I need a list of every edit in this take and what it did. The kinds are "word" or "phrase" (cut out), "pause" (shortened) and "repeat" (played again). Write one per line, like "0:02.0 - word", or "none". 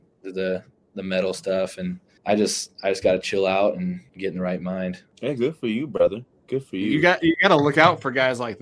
none